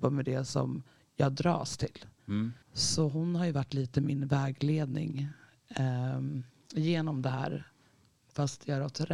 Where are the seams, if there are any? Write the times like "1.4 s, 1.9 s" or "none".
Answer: 2.6 s